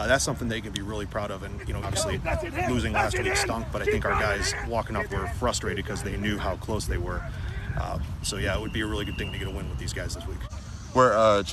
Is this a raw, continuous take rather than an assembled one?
no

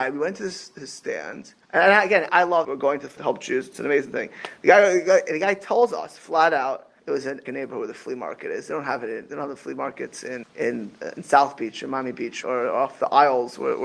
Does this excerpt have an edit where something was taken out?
yes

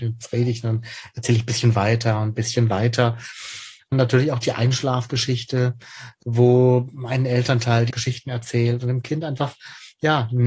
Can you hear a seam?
no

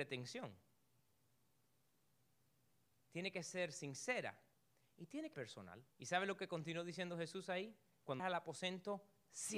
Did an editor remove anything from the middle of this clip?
yes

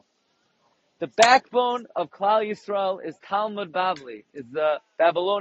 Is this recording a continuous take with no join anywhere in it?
yes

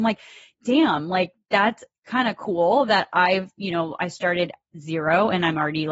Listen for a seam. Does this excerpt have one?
no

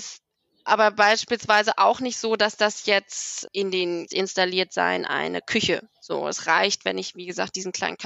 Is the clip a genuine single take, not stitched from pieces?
no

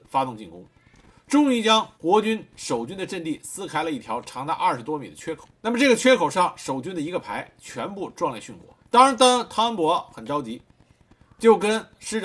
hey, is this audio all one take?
no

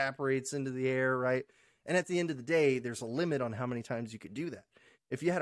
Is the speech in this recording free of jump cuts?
yes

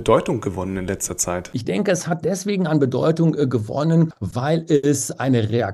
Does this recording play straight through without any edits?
yes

